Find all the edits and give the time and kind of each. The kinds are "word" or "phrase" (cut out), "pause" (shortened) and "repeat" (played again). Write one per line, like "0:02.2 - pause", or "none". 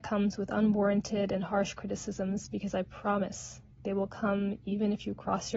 0:03.7 - pause